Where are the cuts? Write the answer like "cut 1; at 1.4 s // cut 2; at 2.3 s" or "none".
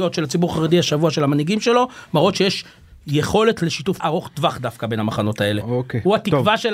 cut 1; at 4.0 s